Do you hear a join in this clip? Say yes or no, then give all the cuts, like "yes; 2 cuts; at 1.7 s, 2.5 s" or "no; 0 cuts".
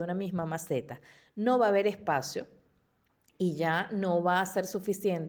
no; 0 cuts